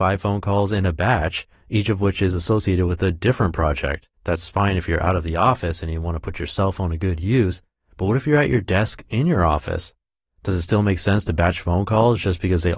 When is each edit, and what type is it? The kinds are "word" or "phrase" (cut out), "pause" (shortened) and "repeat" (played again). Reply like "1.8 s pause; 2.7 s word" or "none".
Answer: 4.1 s pause